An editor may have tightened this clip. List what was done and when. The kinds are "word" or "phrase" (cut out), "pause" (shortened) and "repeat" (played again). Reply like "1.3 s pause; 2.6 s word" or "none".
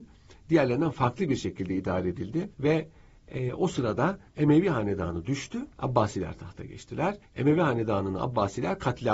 2.5 s pause; 4.3 s pause; 5.7 s pause; 7.3 s pause